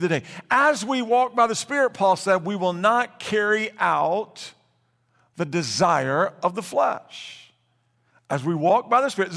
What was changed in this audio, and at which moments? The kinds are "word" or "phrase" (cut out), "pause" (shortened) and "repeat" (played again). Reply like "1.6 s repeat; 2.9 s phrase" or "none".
none